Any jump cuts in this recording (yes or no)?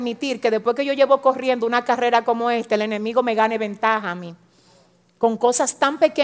no